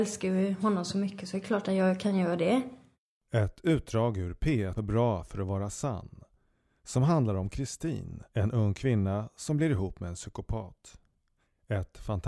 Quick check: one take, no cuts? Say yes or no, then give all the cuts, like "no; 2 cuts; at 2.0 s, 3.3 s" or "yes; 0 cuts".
no; 2 cuts; at 4.8 s, 8.3 s